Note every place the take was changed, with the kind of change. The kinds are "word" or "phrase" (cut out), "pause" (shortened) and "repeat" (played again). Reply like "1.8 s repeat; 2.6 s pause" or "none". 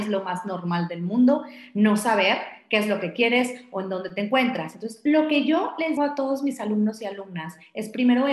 6.0 s word